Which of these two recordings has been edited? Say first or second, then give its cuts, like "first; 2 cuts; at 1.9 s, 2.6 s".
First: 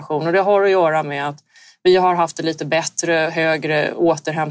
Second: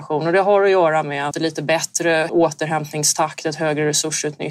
second; 2 cuts; at 1.3 s, 2.3 s